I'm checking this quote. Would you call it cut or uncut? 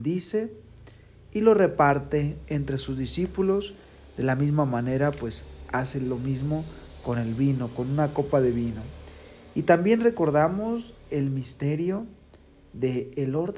uncut